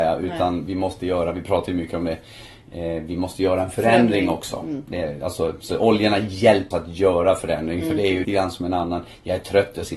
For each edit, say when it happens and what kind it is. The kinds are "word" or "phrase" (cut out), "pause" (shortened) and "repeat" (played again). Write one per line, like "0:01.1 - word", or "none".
0:06.7 - word
0:08.2 - word